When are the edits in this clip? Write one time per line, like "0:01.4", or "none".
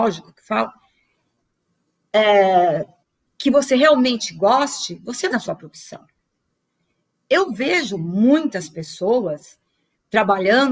0:03.0
0:05.3

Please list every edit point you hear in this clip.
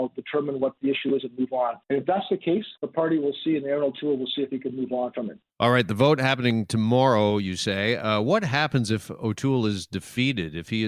0:01.8
0:02.8
0:05.5

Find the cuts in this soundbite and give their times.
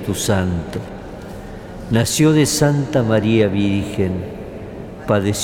none

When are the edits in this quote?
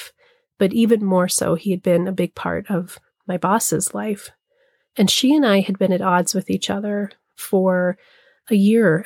none

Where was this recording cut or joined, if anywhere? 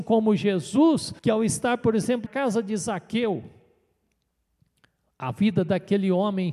0:01.2
0:02.3

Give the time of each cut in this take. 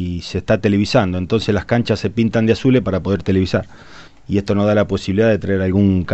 0:04.1

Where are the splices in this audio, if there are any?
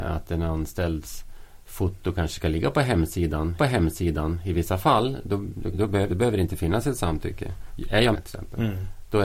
0:03.6
0:05.7
0:06.1
0:08.1

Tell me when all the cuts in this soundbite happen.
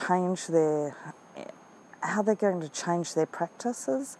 none

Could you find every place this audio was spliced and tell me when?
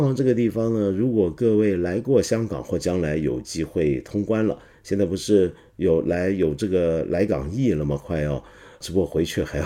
none

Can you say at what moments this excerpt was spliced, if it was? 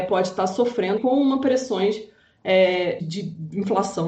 0:01.0
0:03.0

